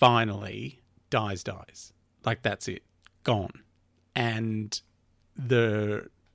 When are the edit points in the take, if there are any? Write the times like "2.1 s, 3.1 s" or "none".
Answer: none

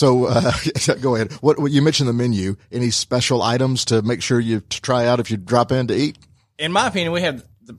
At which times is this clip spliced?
none

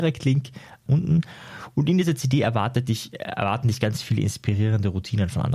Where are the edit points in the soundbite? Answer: none

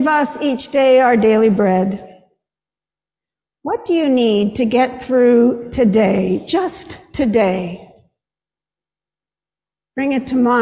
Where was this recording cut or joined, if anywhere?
none

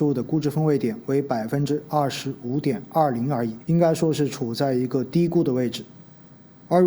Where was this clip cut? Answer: 3.6 s

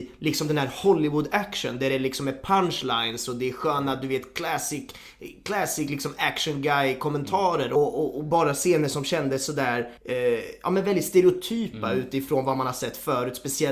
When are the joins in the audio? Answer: 10.0 s

